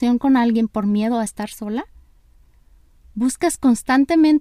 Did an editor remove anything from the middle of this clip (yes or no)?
no